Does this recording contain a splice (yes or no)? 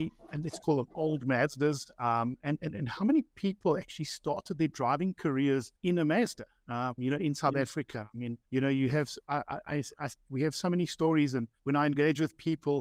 yes